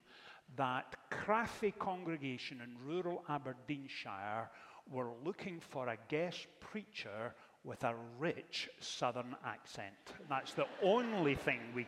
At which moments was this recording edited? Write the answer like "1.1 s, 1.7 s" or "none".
none